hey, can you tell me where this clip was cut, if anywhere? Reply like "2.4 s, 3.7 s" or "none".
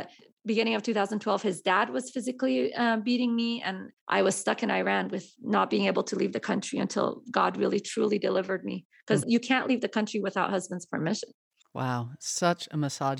4.0 s